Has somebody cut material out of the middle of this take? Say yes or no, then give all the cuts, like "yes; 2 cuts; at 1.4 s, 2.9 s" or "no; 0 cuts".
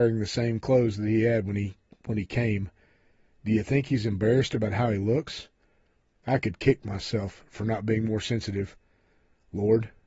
no; 0 cuts